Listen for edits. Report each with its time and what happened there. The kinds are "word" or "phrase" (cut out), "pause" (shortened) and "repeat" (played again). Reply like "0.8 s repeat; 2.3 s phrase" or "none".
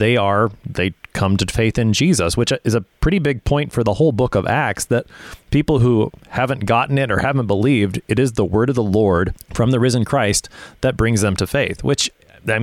9.4 s pause